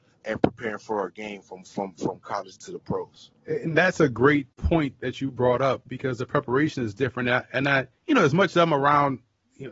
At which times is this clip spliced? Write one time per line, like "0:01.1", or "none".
0:03.4
0:04.5
0:08.0

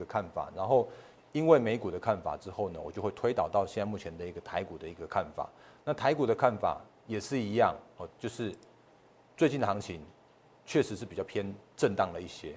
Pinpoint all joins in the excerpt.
none

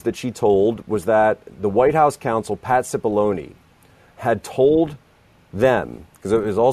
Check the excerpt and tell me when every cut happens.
none

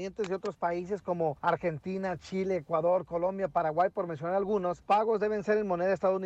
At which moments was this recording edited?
0:04.8

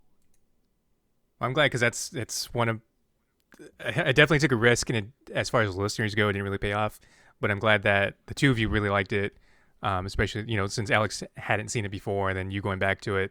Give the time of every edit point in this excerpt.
none

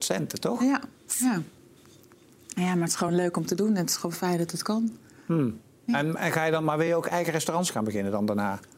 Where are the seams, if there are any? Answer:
none

